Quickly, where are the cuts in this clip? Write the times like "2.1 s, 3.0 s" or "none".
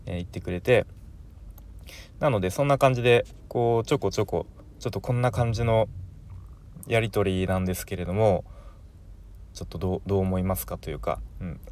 9.5 s